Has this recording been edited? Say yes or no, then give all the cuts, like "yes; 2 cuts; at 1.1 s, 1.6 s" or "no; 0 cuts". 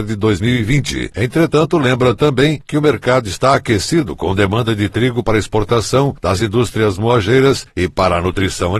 no; 0 cuts